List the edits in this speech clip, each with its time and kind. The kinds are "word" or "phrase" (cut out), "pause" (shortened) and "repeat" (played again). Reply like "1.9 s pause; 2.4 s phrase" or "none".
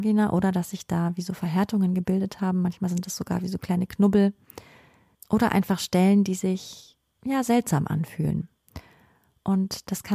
none